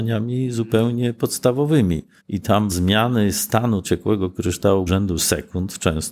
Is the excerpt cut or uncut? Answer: cut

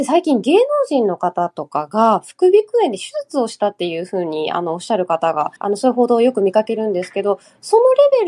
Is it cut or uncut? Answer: cut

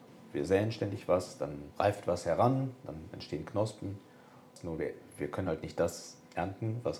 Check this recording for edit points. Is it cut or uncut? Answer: uncut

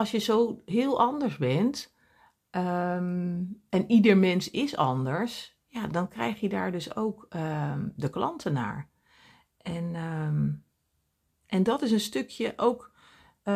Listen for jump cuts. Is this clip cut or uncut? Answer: uncut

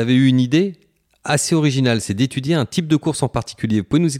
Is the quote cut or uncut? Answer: uncut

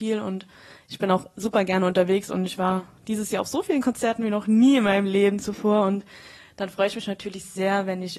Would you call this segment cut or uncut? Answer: uncut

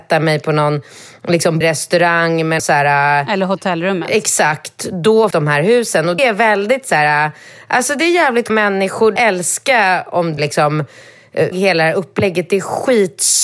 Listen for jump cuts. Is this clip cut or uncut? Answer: cut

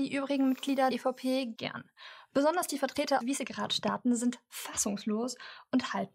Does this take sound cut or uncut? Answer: cut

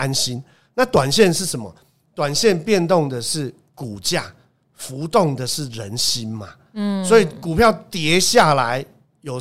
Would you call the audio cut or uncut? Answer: uncut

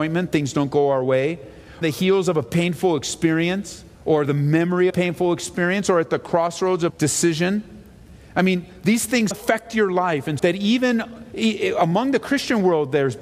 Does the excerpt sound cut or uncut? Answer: cut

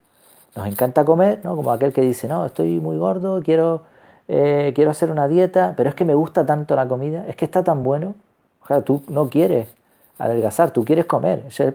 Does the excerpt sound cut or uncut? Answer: uncut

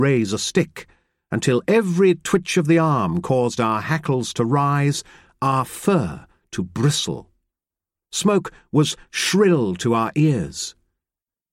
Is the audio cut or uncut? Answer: uncut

